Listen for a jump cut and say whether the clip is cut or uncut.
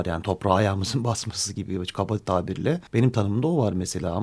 cut